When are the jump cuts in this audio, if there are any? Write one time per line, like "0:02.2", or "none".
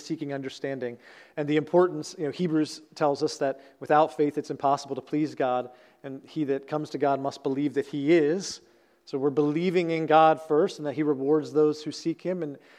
none